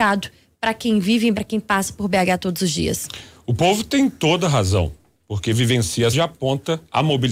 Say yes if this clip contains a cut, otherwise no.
yes